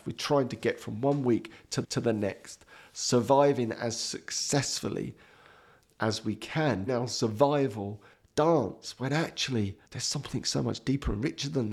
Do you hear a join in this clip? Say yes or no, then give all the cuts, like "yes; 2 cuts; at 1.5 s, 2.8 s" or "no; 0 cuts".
yes; 4 cuts; at 1.8 s, 6.9 s, 8.1 s, 9.9 s